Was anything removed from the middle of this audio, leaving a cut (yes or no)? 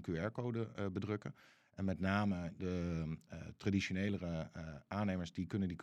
no